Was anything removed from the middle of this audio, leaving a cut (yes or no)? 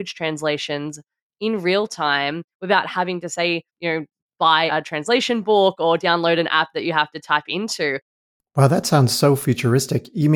yes